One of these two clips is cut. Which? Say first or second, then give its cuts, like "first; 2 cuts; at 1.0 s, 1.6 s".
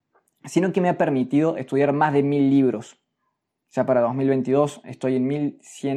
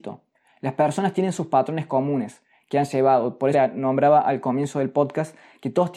second; 1 cut; at 3.5 s